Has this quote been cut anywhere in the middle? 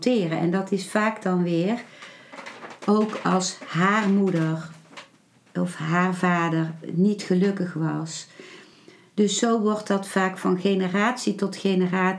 no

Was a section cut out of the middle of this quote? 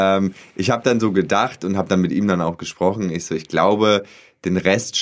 no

